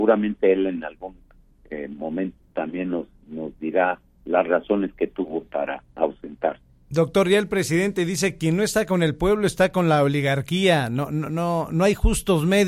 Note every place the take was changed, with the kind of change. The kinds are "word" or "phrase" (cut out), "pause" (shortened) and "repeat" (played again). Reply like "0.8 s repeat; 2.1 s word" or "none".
none